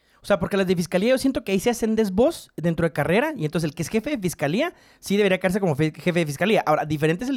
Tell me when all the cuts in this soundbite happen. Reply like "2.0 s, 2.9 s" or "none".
none

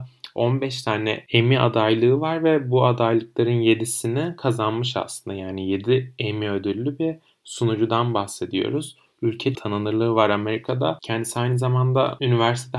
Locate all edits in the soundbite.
9.5 s

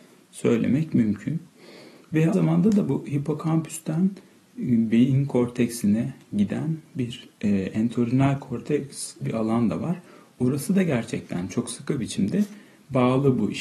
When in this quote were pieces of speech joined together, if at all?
2.3 s, 9.2 s

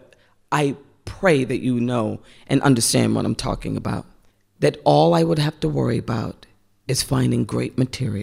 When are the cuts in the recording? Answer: 4.3 s

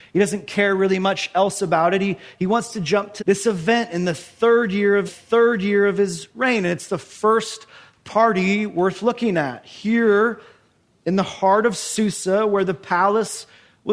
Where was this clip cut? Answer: 3.2 s, 5.1 s

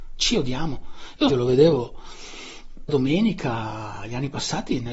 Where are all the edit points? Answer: 1.3 s, 2.9 s

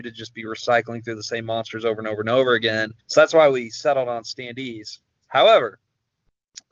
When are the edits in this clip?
3.0 s

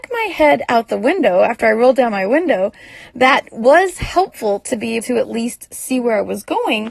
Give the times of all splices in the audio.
5.0 s

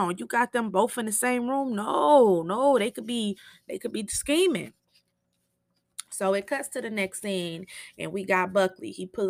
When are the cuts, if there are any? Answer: none

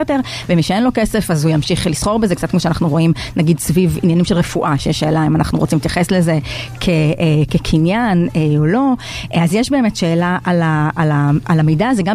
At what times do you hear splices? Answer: none

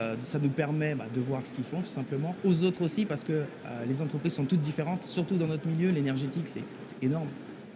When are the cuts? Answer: none

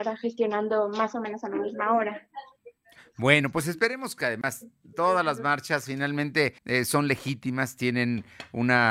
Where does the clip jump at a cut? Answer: 4.2 s, 6.6 s

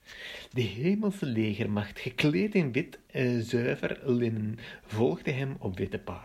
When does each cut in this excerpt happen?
none

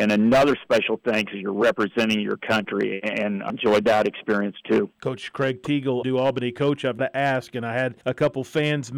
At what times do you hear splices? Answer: 3.5 s, 4.9 s, 6.0 s, 7.0 s, 8.0 s

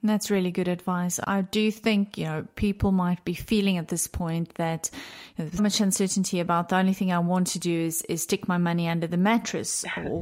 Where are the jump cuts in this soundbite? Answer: 1.2 s, 5.6 s

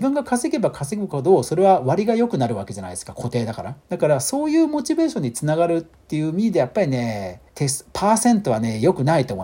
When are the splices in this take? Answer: 3.8 s, 7.5 s

